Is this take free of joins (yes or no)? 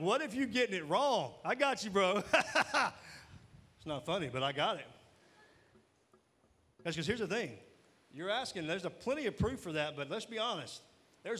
yes